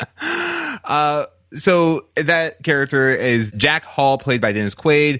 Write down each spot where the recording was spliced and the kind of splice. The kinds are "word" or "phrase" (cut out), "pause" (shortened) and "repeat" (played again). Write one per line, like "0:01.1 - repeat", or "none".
none